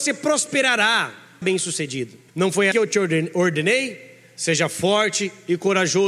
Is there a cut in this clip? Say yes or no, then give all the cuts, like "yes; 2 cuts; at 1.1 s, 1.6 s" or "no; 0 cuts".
yes; 3 cuts; at 1.4 s, 2.3 s, 2.7 s